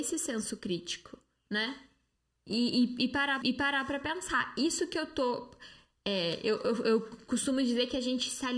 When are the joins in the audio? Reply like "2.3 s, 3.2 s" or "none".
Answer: 2.2 s, 3.4 s